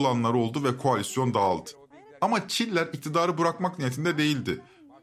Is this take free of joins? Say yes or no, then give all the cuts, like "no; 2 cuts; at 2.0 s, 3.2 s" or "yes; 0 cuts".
yes; 0 cuts